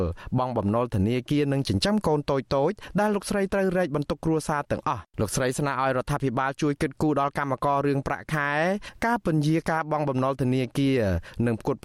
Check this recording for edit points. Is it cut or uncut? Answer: cut